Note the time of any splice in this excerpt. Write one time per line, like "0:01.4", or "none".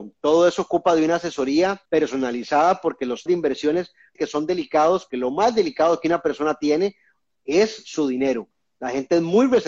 0:01.9
0:03.3
0:04.2
0:05.1

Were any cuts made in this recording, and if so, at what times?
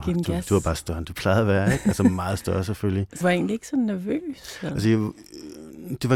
0:03.2

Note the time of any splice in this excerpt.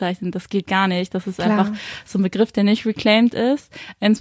none

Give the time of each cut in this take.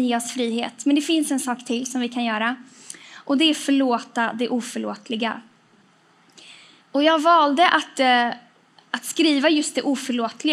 none

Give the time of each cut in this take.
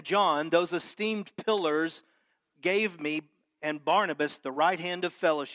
none

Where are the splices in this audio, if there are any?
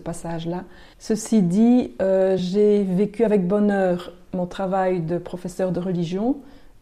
none

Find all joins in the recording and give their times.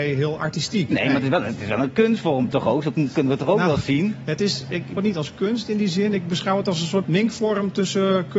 0:05.0
0:07.0

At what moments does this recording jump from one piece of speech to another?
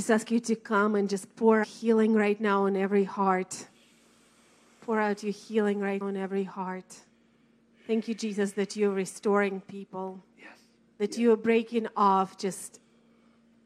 0:01.6
0:06.0

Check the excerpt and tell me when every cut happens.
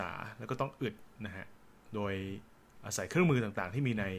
none

